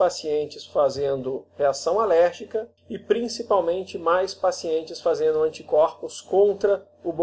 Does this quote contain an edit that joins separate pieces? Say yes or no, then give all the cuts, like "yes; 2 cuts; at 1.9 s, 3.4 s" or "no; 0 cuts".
yes; 1 cut; at 2.8 s